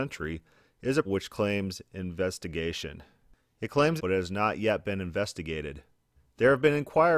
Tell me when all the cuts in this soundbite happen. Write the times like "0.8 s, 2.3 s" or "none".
1.0 s, 4.0 s